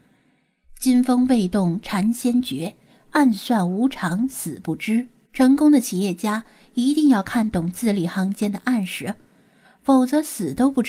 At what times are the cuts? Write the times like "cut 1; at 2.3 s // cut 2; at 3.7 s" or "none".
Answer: cut 1; at 5.2 s